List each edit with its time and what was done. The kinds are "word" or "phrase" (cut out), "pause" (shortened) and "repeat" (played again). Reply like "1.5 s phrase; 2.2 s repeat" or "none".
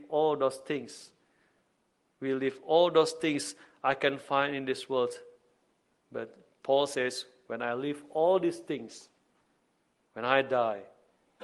none